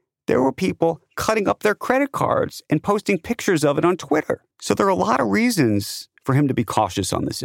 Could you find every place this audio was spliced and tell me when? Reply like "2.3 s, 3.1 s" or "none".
4.5 s, 6.2 s